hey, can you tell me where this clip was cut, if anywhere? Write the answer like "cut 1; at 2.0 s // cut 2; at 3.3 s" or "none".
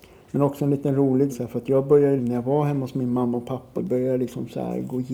cut 1; at 1.3 s // cut 2; at 2.2 s // cut 3; at 3.8 s